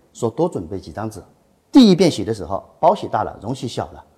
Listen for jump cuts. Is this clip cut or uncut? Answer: uncut